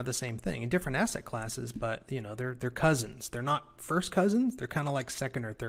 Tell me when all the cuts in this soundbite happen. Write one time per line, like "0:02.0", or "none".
none